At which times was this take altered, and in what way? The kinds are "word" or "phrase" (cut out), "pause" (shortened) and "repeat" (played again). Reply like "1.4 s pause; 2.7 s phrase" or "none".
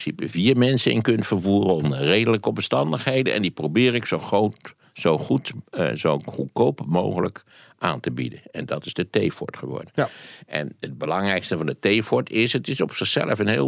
none

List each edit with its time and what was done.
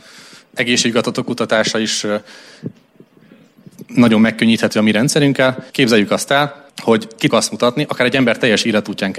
5.7 s pause; 6.7 s pause; 7.3 s word

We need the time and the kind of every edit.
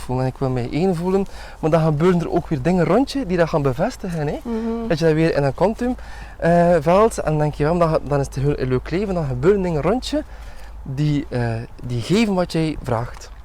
none

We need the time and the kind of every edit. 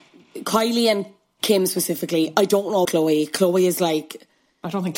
2.8 s word

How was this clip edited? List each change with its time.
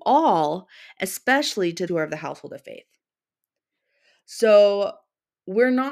1.9 s word

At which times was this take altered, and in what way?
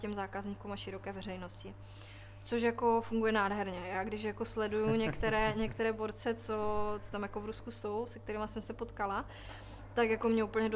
none

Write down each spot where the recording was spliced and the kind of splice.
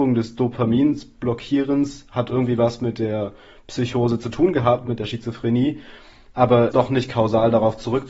6.7 s word

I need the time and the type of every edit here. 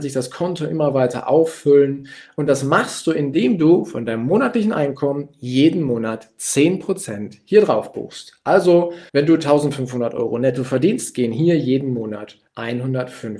9.1 s pause; 12.5 s pause

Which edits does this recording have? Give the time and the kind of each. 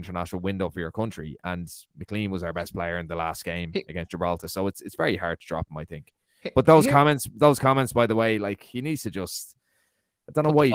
none

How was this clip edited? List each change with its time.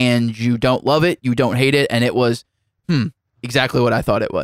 none

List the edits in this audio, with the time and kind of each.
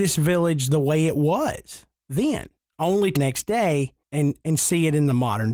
2.6 s pause; 3.2 s phrase; 4.0 s pause

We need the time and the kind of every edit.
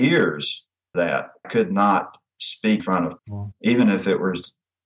0.9 s word; 1.4 s word; 2.8 s word; 3.2 s word

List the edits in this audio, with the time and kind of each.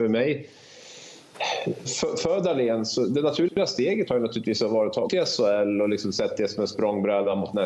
1.9 s word; 5.1 s word

